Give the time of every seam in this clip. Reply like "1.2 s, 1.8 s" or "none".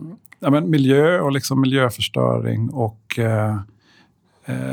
none

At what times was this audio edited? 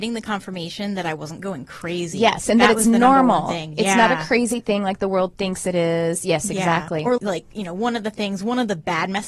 7.2 s

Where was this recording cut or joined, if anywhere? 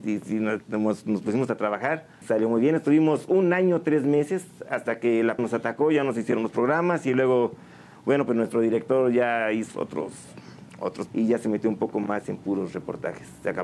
2.2 s, 5.4 s, 9.7 s, 11.1 s

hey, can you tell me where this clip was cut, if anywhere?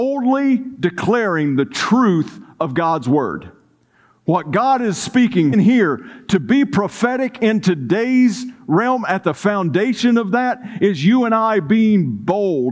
5.5 s

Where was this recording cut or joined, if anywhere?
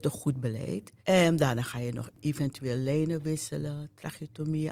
1.0 s

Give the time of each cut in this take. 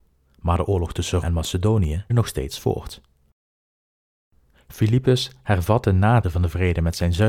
1.2 s, 2.1 s, 6.2 s

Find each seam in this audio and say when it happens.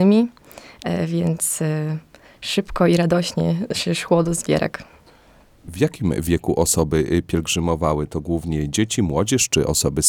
none

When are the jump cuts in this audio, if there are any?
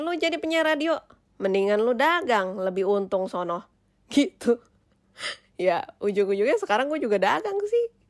none

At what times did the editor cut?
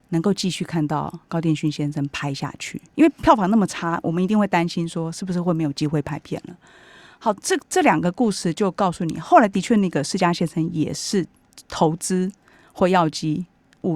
7.6 s

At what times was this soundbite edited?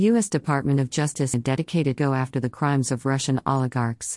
1.3 s, 2.0 s

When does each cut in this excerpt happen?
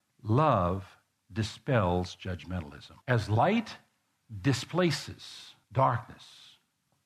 1.2 s, 3.0 s

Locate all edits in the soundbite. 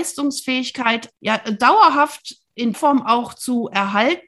1.1 s, 2.7 s

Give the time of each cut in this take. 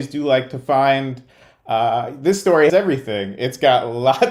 2.7 s

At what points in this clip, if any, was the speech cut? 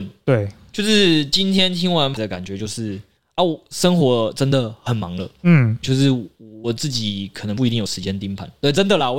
2.2 s, 5.8 s

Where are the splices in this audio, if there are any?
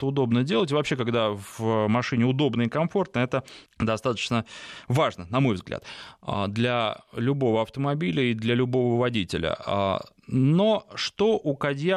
3.7 s

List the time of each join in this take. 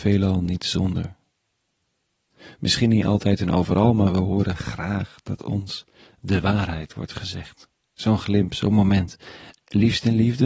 none

